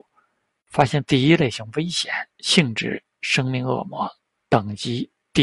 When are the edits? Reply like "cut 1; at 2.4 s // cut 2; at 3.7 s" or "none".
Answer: cut 1; at 2.3 s